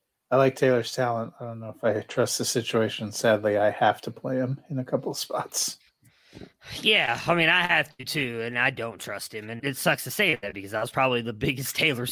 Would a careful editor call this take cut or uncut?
cut